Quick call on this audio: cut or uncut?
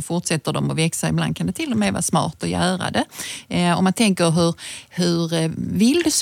uncut